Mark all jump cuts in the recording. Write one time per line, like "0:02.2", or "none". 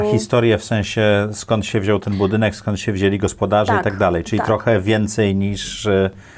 none